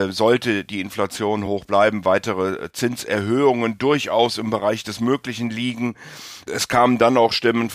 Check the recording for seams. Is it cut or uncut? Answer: uncut